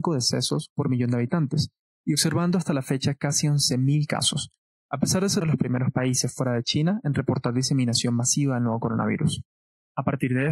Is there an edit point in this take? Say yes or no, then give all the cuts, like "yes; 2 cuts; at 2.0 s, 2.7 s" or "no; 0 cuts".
yes; 1 cut; at 5.4 s